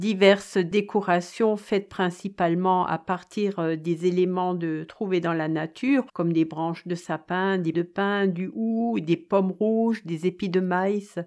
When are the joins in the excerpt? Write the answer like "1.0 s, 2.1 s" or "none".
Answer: 6.1 s, 7.7 s